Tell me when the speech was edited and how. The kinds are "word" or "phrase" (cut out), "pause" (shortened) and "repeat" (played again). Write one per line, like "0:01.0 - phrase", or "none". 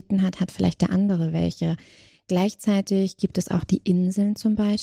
none